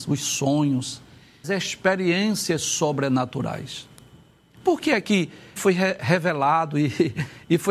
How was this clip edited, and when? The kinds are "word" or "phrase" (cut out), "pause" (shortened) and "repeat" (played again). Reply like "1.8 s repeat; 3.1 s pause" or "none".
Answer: 1.4 s word; 5.6 s word